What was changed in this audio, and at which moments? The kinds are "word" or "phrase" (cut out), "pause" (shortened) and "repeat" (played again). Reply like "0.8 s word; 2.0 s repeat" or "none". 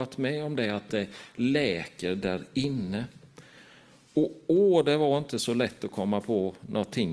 none